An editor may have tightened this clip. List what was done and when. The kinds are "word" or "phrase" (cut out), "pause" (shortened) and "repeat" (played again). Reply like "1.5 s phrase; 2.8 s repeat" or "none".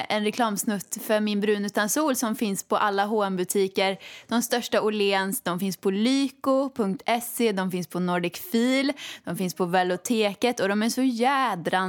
none